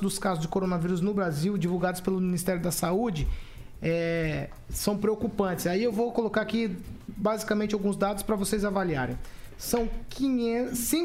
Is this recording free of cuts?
yes; 0 cuts

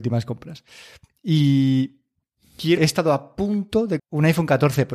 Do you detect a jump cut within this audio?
yes; 2 cuts; at 2.8 s, 4.0 s

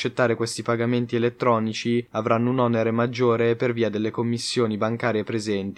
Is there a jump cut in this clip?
no; 0 cuts

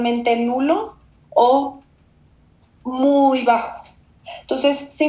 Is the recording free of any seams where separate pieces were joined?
yes; 0 cuts

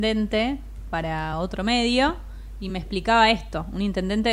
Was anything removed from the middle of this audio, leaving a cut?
no; 0 cuts

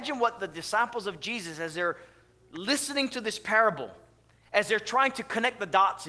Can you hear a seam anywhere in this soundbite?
no; 0 cuts

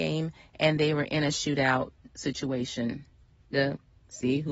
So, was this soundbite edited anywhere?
yes; 2 cuts; at 2.1 s, 3.5 s

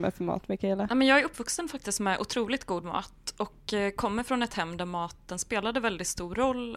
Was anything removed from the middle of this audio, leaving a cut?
no; 0 cuts

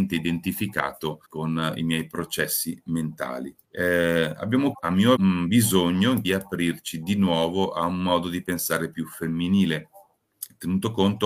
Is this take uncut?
no; 5 cuts; at 1.2 s, 3.6 s, 4.7 s, 5.2 s, 6.2 s

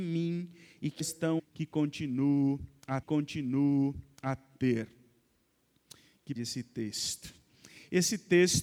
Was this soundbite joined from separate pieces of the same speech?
yes; 4 cuts; at 1.0 s, 1.4 s, 3.0 s, 6.4 s

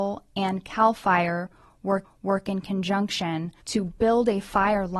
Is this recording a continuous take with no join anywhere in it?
no; 2 cuts; at 2.0 s, 3.6 s

